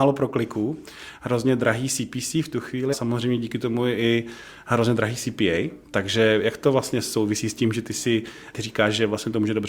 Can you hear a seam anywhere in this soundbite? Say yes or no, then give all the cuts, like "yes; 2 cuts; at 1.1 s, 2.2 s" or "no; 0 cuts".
yes; 2 cuts; at 2.9 s, 5.8 s